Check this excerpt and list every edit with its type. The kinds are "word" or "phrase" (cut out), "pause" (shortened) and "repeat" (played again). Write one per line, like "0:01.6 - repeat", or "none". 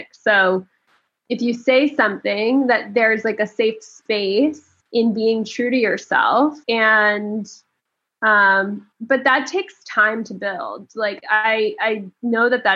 0:04.8 - pause
0:06.6 - pause
0:08.9 - pause